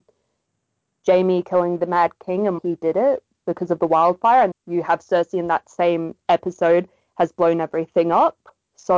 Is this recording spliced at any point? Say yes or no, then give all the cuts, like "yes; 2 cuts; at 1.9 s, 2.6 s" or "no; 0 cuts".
yes; 2 cuts; at 2.6 s, 4.5 s